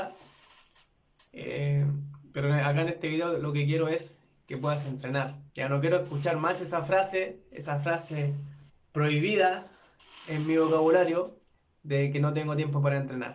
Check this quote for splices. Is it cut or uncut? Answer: cut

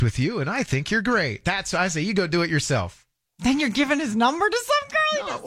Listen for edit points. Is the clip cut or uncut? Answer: uncut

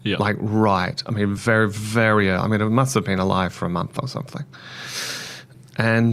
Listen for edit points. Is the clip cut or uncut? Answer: uncut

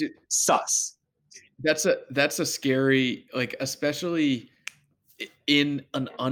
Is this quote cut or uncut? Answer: uncut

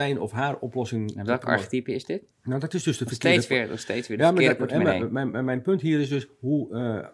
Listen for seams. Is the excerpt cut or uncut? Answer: cut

